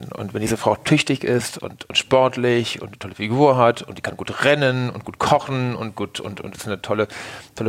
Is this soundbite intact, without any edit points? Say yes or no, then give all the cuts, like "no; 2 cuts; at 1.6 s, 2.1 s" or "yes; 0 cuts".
yes; 0 cuts